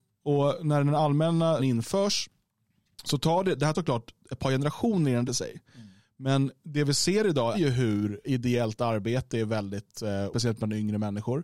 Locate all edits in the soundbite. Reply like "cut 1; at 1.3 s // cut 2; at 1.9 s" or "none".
cut 1; at 1.6 s // cut 2; at 3.7 s // cut 3; at 5.3 s // cut 4; at 7.5 s // cut 5; at 8.2 s // cut 6; at 10.3 s